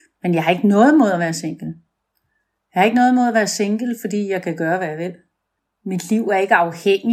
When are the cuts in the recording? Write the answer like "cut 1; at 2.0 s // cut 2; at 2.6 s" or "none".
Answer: none